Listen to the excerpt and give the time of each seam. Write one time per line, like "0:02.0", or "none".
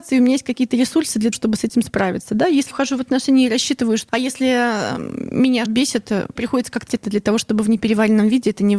0:01.3
0:02.7
0:04.1
0:05.7
0:06.4
0:06.9